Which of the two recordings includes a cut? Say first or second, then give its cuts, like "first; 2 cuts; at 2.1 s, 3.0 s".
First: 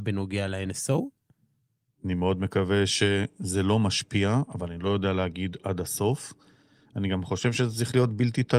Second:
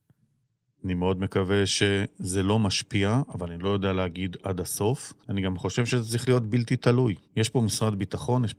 second; 2 cuts; at 5.2 s, 7.2 s